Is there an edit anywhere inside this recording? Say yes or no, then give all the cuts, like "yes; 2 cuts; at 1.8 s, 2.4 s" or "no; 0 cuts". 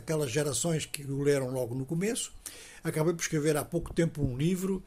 no; 0 cuts